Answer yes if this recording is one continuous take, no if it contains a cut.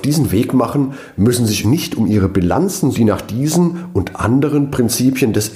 no